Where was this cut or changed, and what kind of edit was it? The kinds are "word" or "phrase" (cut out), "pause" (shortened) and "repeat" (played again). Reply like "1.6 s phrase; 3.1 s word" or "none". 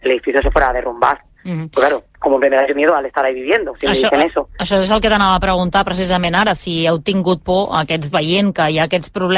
2.7 s word; 8.1 s word